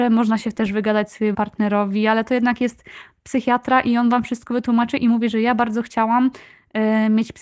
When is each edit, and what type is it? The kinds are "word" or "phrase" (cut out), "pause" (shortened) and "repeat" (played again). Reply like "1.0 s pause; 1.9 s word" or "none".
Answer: 1.3 s word